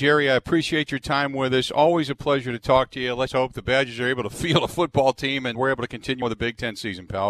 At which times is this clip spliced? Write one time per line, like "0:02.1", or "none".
0:03.3
0:05.5
0:06.2

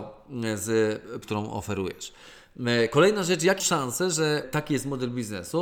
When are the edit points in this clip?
0:01.2
0:03.6
0:04.4

